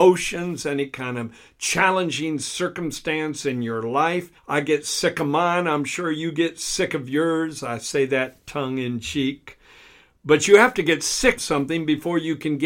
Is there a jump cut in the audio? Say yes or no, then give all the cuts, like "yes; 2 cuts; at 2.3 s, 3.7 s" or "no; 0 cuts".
yes; 2 cuts; at 4.4 s, 11.4 s